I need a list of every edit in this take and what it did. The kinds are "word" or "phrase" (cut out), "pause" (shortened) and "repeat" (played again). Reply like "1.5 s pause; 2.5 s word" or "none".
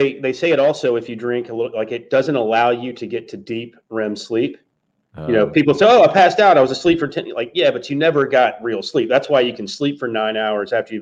none